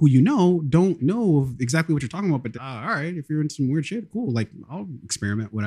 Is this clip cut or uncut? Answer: cut